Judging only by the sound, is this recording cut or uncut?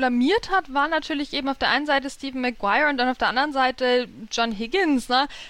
uncut